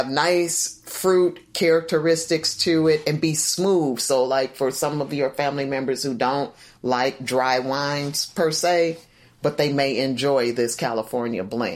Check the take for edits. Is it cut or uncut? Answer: uncut